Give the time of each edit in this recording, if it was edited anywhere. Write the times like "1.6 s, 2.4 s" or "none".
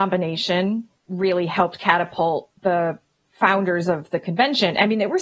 1.0 s, 2.6 s